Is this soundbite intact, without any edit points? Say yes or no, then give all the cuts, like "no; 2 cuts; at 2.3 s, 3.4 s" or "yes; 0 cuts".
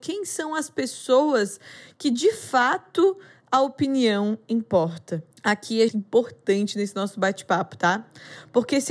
no; 2 cuts; at 5.3 s, 5.9 s